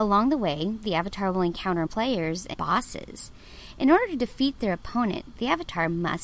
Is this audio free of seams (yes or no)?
no